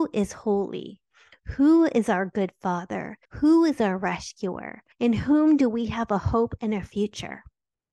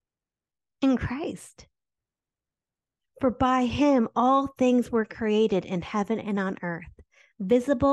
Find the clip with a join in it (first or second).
first